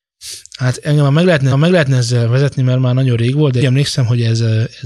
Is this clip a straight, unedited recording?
no; 2 cuts; at 1.5 s, 3.6 s

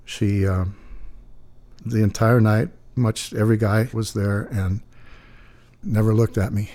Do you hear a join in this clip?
yes; 4 cuts; at 1.8 s, 3.0 s, 3.9 s, 5.8 s

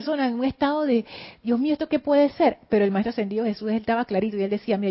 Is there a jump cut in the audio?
no; 0 cuts

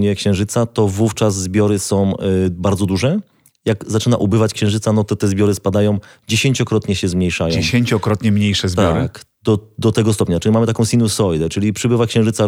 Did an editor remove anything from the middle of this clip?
no; 0 cuts

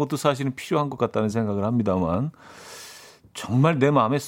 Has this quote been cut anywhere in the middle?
no; 0 cuts

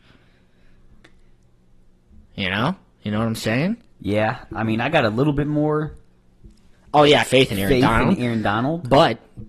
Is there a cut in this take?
yes; 3 cuts; at 2.2 s, 6.7 s, 7.2 s

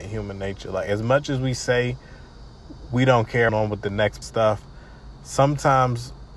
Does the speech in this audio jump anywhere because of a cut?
yes; 2 cuts; at 3.5 s, 4.2 s

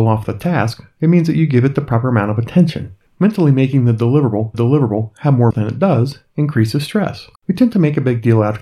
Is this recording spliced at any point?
yes; 3 cuts; at 4.5 s, 5.5 s, 7.3 s

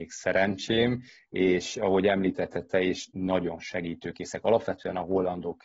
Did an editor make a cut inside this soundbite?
no; 0 cuts

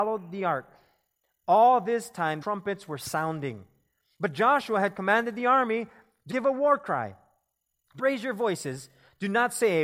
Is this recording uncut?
no; 3 cuts; at 2.4 s, 6.3 s, 8.0 s

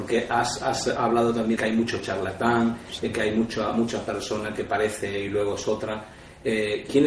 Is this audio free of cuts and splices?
no; 1 cut; at 1.6 s

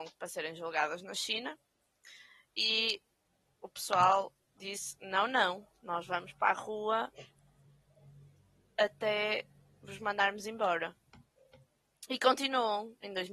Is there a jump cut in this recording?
no; 0 cuts

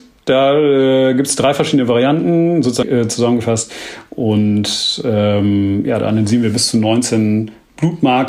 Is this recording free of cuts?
no; 1 cut; at 2.8 s

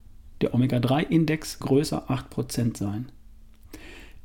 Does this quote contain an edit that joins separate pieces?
yes; 1 cut; at 1.6 s

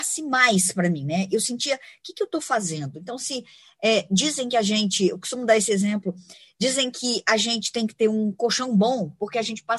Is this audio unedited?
yes; 0 cuts

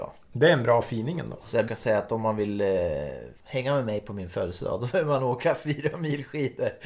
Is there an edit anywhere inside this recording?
yes; 2 cuts; at 1.7 s, 3.4 s

